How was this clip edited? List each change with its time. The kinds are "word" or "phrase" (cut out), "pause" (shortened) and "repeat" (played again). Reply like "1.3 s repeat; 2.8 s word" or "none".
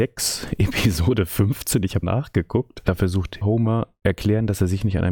2.0 s word; 3.4 s word; 4.0 s word